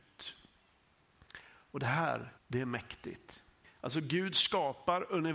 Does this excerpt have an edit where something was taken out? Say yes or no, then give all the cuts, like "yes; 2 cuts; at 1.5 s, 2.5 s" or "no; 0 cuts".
yes; 2 cuts; at 2.4 s, 3.6 s